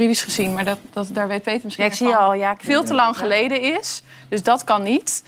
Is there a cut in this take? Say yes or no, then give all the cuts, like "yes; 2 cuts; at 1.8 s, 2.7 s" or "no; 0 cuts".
no; 0 cuts